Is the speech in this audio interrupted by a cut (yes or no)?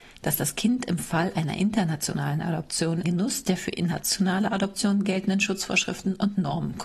yes